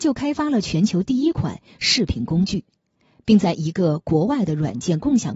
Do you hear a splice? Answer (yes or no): no